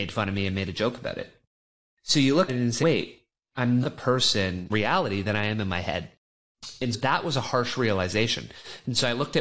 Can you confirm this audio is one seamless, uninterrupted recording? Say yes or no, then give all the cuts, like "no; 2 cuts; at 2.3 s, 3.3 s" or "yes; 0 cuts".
no; 5 cuts; at 2.5 s, 2.8 s, 3.8 s, 4.7 s, 6.9 s